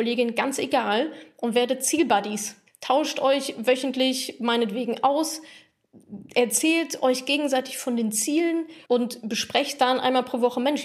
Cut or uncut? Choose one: cut